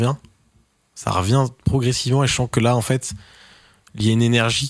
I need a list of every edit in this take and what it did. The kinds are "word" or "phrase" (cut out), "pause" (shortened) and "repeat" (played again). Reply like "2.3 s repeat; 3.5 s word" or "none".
none